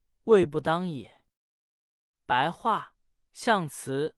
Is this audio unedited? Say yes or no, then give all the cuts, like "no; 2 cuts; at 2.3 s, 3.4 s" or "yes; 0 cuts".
no; 1 cut; at 1.4 s